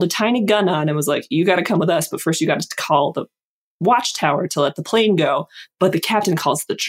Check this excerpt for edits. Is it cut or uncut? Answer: uncut